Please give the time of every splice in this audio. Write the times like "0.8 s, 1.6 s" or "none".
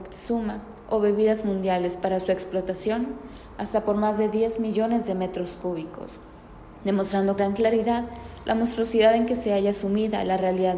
7.4 s